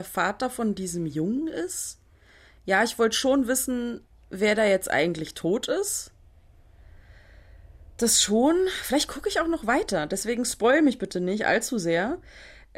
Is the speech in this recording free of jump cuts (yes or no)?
yes